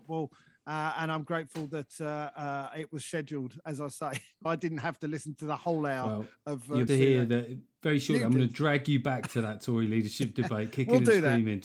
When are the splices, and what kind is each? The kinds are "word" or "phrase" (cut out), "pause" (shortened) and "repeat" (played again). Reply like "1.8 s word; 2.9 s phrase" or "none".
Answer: 4.5 s word; 6.9 s phrase